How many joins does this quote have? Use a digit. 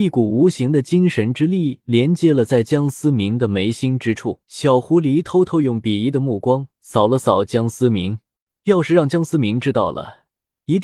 2